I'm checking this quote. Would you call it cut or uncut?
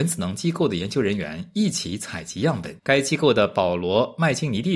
cut